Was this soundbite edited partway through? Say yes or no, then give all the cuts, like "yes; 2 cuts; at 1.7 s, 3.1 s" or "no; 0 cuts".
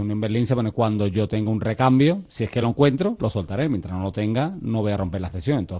no; 0 cuts